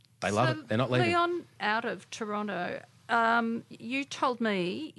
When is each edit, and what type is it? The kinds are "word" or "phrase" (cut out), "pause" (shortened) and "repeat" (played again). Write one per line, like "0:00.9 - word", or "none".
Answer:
0:01.6 - word